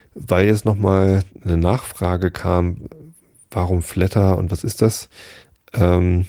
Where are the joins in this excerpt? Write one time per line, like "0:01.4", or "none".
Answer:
none